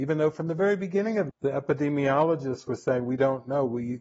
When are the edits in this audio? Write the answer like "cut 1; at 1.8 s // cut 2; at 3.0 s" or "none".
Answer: cut 1; at 1.3 s